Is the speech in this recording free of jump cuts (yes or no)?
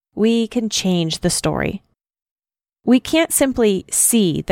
yes